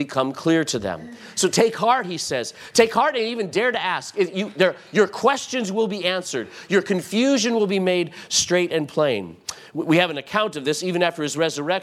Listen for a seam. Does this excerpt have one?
no; 0 cuts

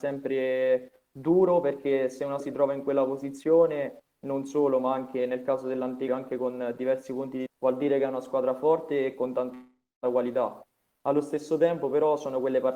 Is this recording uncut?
no; 3 cuts; at 2.4 s, 6.1 s, 7.5 s

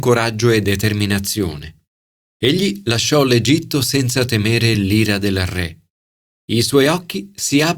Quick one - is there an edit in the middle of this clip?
no; 0 cuts

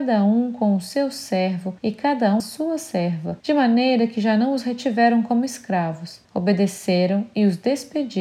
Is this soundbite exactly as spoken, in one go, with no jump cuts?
no; 4 cuts; at 1.8 s, 2.4 s, 3.4 s, 6.2 s

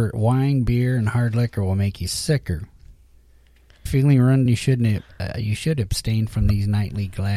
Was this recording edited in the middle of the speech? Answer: yes; 2 cuts; at 3.9 s, 4.5 s

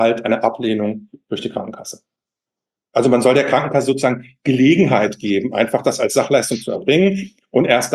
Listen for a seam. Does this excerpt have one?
no; 0 cuts

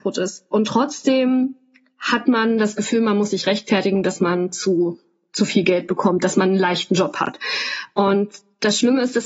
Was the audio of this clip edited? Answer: no; 0 cuts

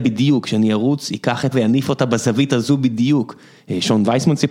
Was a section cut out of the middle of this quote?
yes; 1 cut; at 1.5 s

